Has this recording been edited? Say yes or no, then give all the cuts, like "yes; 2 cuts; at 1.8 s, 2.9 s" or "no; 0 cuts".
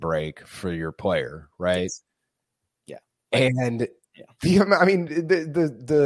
no; 0 cuts